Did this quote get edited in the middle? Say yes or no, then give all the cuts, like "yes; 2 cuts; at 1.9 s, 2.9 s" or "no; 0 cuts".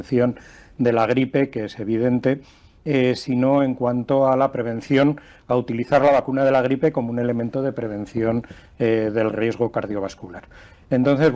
no; 0 cuts